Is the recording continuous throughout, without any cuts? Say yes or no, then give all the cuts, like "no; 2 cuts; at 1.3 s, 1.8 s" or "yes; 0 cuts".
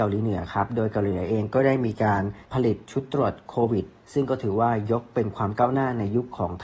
no; 2 cuts; at 2.4 s, 4.0 s